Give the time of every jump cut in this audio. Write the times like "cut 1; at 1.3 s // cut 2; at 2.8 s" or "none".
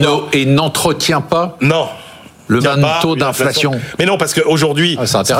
cut 1; at 2.6 s

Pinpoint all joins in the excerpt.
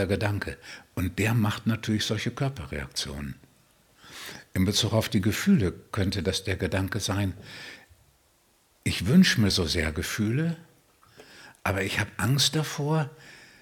none

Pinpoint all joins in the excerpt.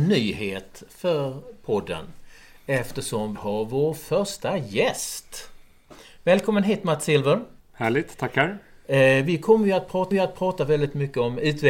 cut 1; at 3.3 s // cut 2; at 7.6 s // cut 3; at 10.1 s

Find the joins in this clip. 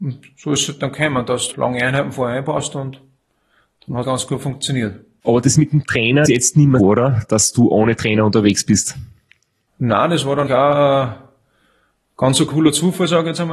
cut 1; at 1.5 s // cut 2; at 4.0 s // cut 3; at 6.3 s // cut 4; at 6.8 s // cut 5; at 10.5 s

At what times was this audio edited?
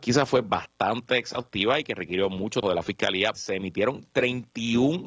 cut 1; at 2.6 s // cut 2; at 3.4 s

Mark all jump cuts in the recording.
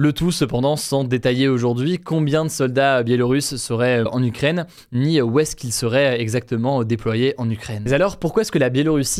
cut 1; at 4.1 s

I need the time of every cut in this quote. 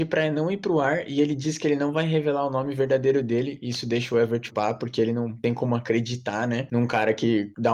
cut 1; at 4.5 s

